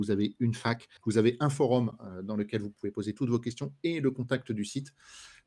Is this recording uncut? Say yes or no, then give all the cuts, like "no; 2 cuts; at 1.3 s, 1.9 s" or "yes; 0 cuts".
no; 1 cut; at 1.0 s